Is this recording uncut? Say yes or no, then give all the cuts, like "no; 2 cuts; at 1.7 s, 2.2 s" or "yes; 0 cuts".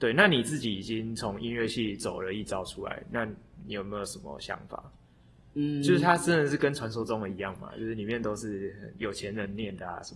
yes; 0 cuts